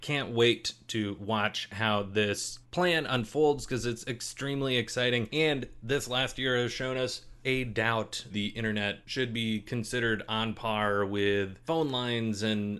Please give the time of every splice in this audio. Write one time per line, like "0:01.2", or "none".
0:07.4
0:08.3